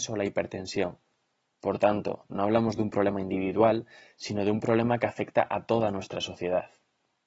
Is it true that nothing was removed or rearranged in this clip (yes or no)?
yes